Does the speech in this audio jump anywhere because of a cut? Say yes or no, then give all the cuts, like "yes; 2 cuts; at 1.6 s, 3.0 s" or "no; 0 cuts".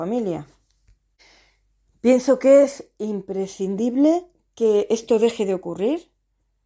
no; 0 cuts